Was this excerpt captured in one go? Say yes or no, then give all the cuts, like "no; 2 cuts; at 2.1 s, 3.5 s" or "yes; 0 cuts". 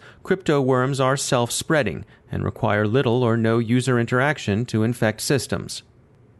yes; 0 cuts